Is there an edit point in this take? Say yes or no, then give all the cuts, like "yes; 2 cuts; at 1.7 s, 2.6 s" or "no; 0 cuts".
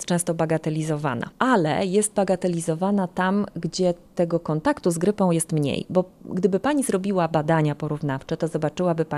no; 0 cuts